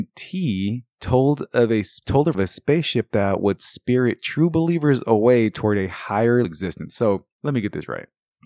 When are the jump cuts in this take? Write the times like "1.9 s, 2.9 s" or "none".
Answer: 2.3 s, 6.4 s, 7.3 s